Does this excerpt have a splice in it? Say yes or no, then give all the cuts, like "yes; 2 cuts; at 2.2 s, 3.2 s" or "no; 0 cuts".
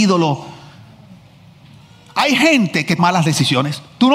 yes; 1 cut; at 3.0 s